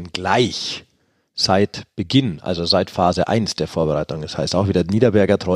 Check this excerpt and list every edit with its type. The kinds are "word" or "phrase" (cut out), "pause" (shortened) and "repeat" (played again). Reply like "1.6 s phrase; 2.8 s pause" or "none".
none